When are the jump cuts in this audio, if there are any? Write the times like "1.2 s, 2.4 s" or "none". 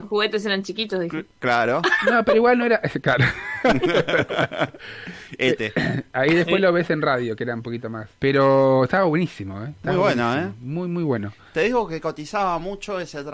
8.2 s

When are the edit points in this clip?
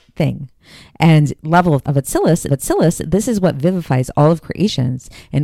1.4 s, 1.8 s, 2.5 s

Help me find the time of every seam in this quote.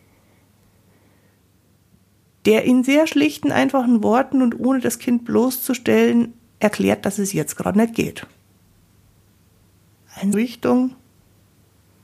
10.3 s

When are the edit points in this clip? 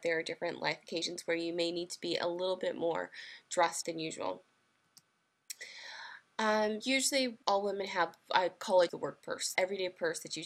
3.8 s, 6.8 s, 7.4 s, 8.9 s, 9.6 s

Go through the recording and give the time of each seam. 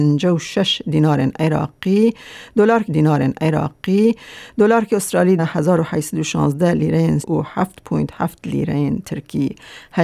2.8 s, 5.4 s, 7.2 s

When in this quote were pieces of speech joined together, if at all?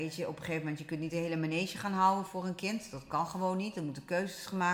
2.3 s

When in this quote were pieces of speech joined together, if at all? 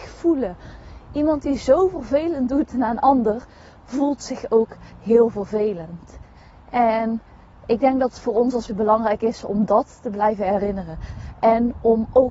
8.7 s

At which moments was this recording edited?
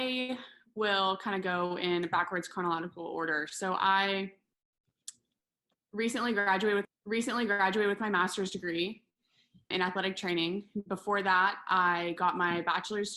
6.8 s, 9.7 s

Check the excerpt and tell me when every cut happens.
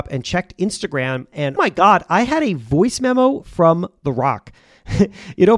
1.6 s

